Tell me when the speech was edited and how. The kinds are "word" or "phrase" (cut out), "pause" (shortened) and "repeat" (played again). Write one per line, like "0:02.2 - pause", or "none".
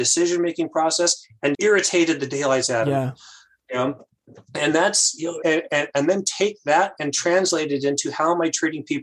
0:01.5 - word
0:05.4 - word